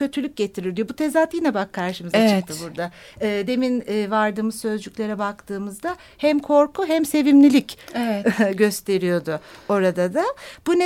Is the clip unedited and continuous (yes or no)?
yes